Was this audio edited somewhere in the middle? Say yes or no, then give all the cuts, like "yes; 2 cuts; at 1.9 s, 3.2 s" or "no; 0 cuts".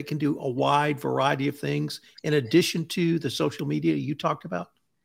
no; 0 cuts